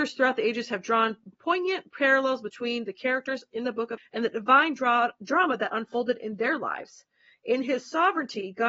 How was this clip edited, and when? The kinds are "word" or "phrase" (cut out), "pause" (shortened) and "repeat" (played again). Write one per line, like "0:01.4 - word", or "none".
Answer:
0:01.3 - word
0:04.0 - word